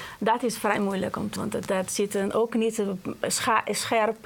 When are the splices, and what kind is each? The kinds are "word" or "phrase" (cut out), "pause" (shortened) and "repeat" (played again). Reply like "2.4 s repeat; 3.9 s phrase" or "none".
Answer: 1.4 s word